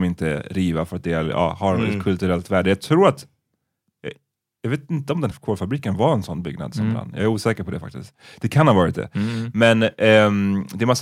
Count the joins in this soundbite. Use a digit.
1